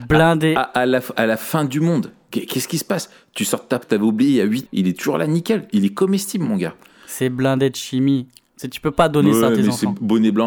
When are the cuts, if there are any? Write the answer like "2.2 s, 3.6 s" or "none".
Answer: 3.8 s, 4.7 s